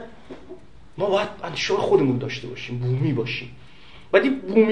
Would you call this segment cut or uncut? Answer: uncut